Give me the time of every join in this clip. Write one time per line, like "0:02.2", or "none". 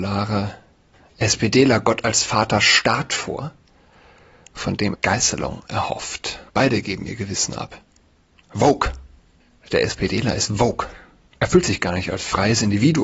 0:04.9
0:06.5